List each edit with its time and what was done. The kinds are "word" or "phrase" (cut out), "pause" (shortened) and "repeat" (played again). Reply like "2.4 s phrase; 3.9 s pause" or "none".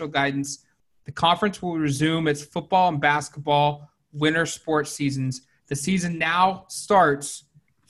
5.6 s pause